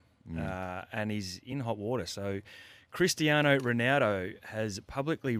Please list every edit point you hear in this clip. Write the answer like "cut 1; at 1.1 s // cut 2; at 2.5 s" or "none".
none